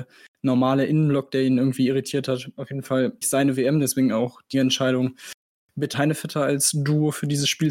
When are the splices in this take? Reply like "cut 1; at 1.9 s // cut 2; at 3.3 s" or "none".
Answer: cut 1; at 3.2 s // cut 2; at 4.5 s // cut 3; at 5.9 s